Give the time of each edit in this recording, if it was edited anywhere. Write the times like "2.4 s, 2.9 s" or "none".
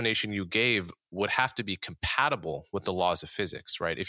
none